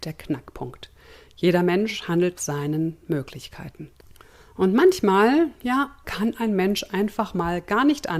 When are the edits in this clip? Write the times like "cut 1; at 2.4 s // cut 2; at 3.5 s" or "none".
cut 1; at 2.4 s // cut 2; at 6.0 s